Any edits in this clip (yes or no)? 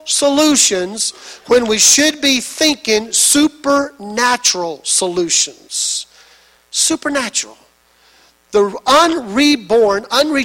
no